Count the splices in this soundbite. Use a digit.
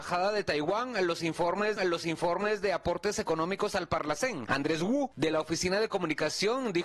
1